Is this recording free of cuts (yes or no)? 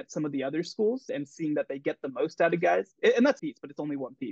no